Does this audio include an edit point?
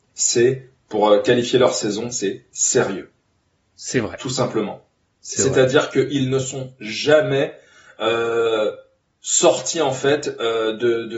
no; 0 cuts

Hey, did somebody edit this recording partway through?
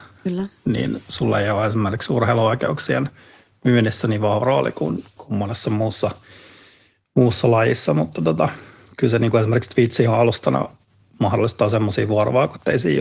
no; 0 cuts

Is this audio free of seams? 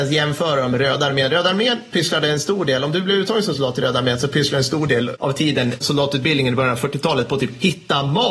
yes; 0 cuts

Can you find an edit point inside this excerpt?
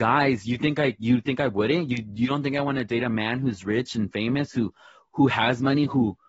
no; 0 cuts

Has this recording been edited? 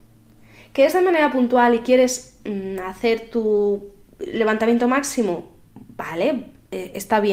no; 0 cuts

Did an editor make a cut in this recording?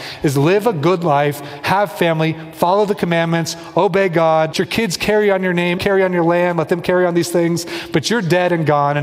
yes; 2 cuts; at 4.5 s, 5.8 s

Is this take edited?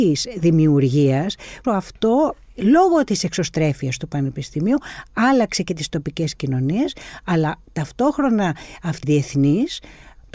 yes; 2 cuts; at 1.6 s, 9.0 s

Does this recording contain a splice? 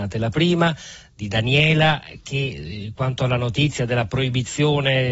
no; 0 cuts

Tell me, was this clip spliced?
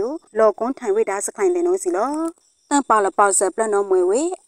no; 0 cuts

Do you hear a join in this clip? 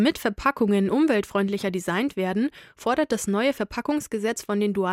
no; 0 cuts

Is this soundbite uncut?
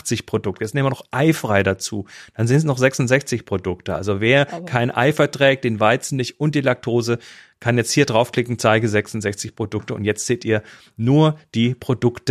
yes; 0 cuts

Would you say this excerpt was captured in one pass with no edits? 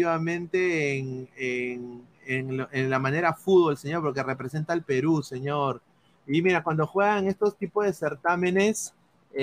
yes; 0 cuts

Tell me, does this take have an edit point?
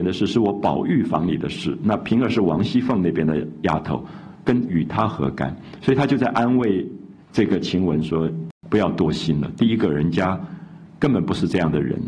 yes; 2 cuts; at 7.2 s, 8.6 s

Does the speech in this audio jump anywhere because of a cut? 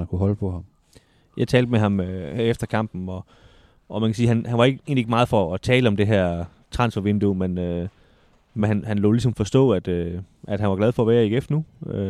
no; 0 cuts

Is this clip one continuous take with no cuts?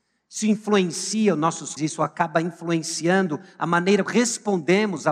no; 2 cuts; at 1.8 s, 4.1 s

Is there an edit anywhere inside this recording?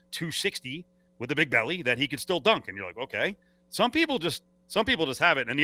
no; 0 cuts

